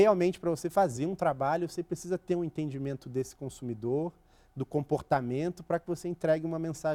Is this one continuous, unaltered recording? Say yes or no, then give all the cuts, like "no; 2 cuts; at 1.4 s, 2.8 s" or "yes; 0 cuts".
yes; 0 cuts